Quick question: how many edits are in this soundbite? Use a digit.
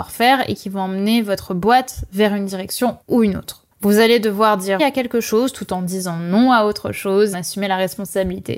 4